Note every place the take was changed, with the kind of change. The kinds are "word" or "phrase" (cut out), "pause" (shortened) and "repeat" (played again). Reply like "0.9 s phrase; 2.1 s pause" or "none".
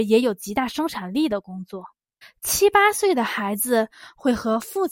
2.2 s pause